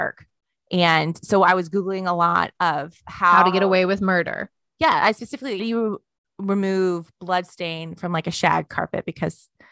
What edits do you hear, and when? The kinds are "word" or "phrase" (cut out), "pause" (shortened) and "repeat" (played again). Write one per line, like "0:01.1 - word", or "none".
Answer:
0:05.6 - word